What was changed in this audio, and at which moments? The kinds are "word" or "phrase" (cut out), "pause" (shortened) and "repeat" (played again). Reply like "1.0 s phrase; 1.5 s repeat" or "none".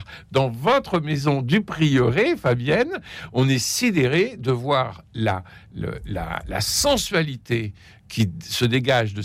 none